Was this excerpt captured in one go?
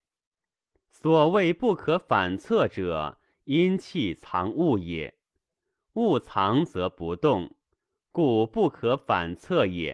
yes; 0 cuts

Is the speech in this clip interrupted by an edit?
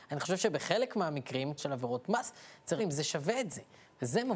yes; 2 cuts; at 1.6 s, 2.8 s

